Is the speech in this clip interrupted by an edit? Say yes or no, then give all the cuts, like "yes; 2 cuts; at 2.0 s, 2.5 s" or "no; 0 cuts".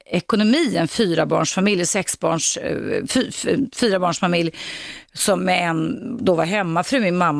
no; 0 cuts